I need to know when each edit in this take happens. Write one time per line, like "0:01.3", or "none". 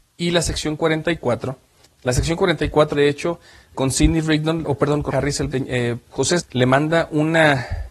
0:01.9
0:02.9
0:03.7
0:04.6
0:05.1
0:05.5
0:06.4